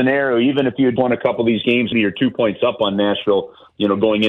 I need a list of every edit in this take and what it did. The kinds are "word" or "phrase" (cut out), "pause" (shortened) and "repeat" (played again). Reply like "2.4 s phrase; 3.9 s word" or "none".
1.0 s word; 1.9 s word